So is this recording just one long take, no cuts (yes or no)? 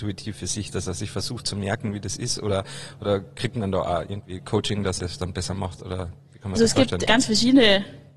no